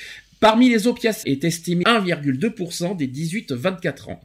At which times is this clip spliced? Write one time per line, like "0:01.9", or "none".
0:01.2
0:01.8

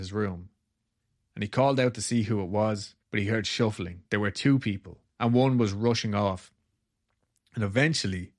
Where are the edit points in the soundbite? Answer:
0:03.0
0:04.1

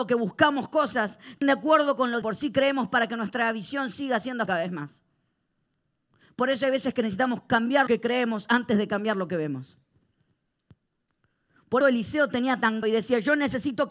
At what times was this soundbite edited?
0:01.4
0:02.2
0:04.5
0:07.9
0:11.8
0:12.8

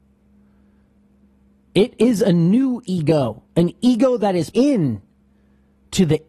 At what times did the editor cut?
0:04.5

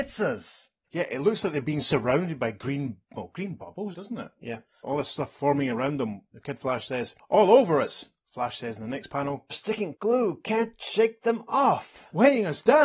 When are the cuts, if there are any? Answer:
0:03.0
0:03.9
0:07.2
0:09.5
0:09.9

